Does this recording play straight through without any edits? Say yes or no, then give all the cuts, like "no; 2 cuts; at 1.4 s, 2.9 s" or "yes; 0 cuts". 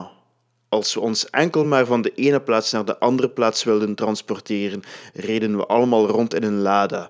yes; 0 cuts